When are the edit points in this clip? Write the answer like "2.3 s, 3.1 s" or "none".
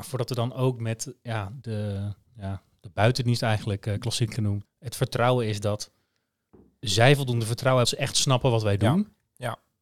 1.6 s, 2.3 s, 4.6 s, 7.8 s